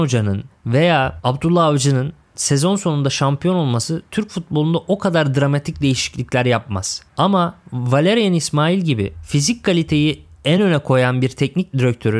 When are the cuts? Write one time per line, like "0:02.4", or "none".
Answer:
none

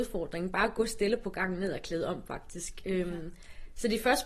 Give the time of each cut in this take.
none

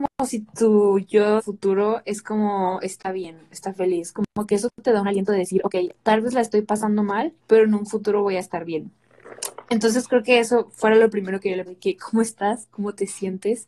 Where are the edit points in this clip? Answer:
0:01.4
0:04.7
0:06.0
0:07.4
0:11.7

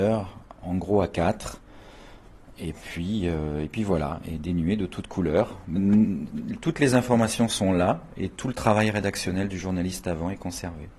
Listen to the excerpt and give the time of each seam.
0:05.8

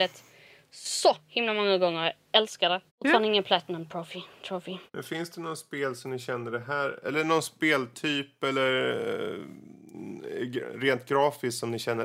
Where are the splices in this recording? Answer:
0:02.9
0:04.9

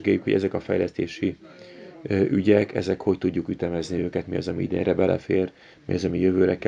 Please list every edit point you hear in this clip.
none

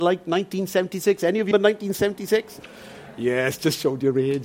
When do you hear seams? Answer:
0:01.5

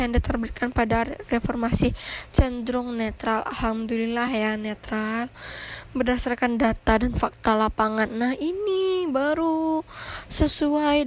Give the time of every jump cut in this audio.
none

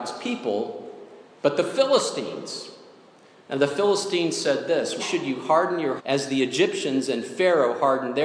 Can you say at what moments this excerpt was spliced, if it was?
0:05.0
0:06.0

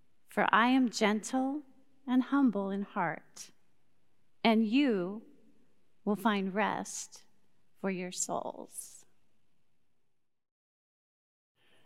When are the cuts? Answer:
none

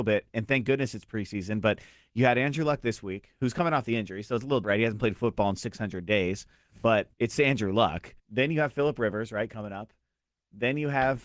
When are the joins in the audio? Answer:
0:04.6
0:07.1
0:08.2

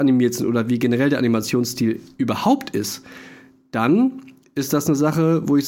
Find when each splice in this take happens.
none

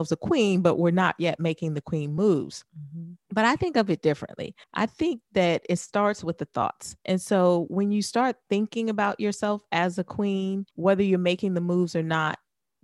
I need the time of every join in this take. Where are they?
0:02.7
0:04.6
0:07.0
0:10.7

